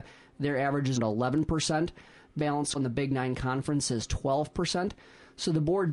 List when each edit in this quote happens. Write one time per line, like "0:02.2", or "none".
0:01.0
0:02.4
0:02.7